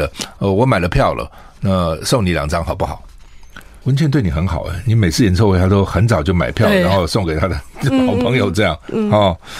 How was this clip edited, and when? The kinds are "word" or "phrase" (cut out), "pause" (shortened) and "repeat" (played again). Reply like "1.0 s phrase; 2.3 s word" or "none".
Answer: 3.8 s pause